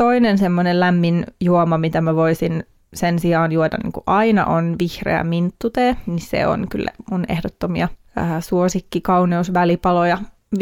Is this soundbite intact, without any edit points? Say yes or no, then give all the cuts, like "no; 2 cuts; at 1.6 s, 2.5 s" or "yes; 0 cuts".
yes; 0 cuts